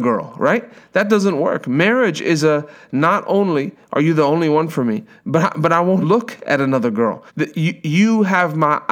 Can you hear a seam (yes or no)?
yes